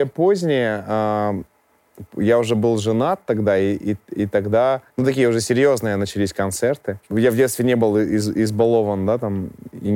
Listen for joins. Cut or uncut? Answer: cut